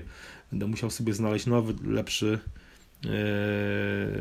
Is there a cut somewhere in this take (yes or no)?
no